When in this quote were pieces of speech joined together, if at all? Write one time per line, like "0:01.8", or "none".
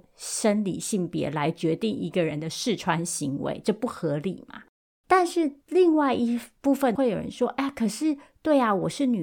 0:05.6